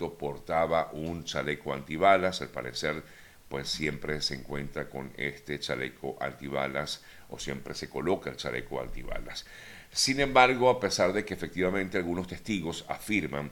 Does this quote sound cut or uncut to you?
uncut